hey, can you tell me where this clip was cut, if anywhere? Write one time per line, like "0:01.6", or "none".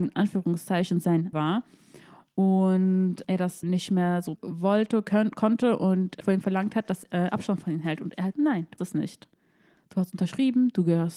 0:01.3
0:03.2
0:03.6
0:04.4
0:06.2
0:07.1
0:08.3
0:08.8